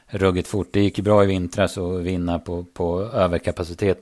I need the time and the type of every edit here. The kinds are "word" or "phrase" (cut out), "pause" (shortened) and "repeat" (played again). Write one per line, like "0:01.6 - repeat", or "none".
none

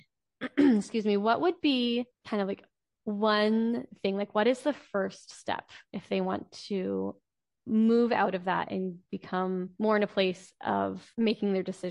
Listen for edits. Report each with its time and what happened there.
0:02.1 - pause
0:09.7 - pause

